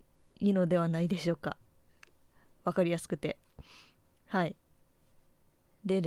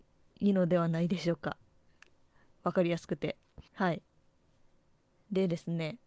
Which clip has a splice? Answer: second; 1 cut; at 3.7 s

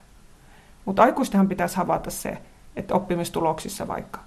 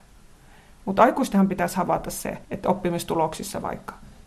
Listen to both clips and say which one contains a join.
second; 1 cut; at 2.4 s

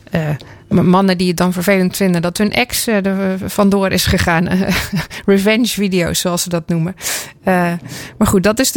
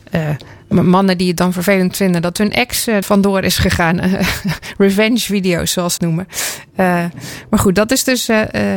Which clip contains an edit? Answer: second; 2 cuts; at 3.0 s, 6.0 s

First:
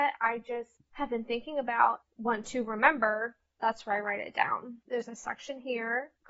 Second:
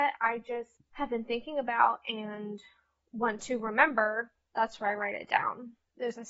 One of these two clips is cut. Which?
first; 2 cuts; at 2.0 s, 4.8 s

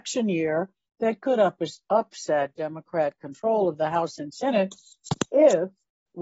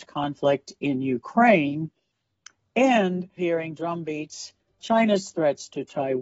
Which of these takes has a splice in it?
second; 2 cuts; at 3.4 s, 4.8 s

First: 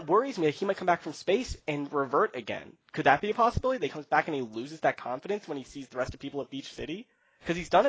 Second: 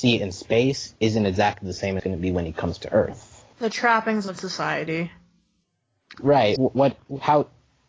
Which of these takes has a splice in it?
second; 5 cuts; at 2.0 s, 2.8 s, 3.5 s, 4.4 s, 6.6 s

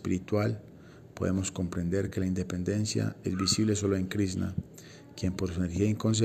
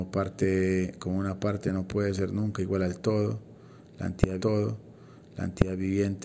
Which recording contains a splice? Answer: second; 1 cut; at 4.4 s

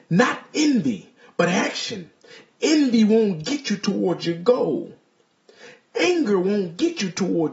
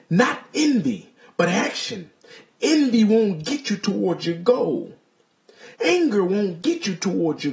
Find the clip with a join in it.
second; 1 cut; at 5.8 s

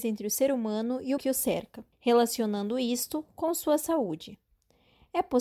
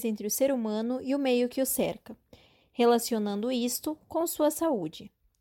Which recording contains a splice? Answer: first; 2 cuts; at 1.2 s, 1.9 s

